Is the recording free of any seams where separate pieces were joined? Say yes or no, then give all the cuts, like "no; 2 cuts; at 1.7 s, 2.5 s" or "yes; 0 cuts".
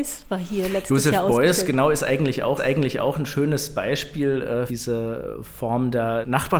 no; 2 cuts; at 2.6 s, 4.7 s